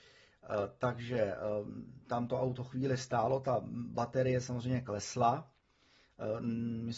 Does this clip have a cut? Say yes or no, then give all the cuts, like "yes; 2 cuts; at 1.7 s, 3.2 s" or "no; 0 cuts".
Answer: no; 0 cuts